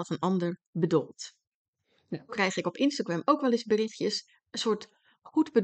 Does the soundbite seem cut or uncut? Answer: cut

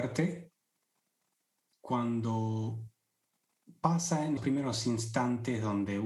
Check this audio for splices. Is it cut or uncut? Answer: cut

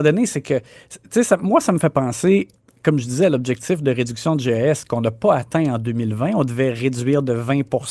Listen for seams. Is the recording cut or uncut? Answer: uncut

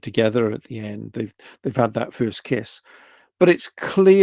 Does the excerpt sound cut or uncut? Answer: uncut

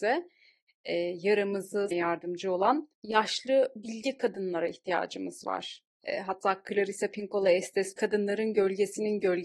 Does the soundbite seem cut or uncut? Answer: cut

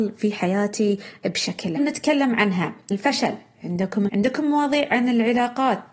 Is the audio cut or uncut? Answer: cut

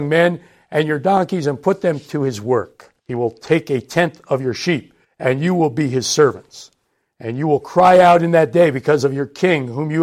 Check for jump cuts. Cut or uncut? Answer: cut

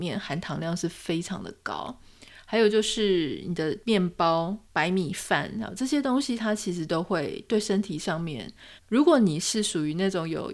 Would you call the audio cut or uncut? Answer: cut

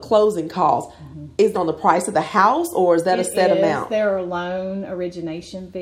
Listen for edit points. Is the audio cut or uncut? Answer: cut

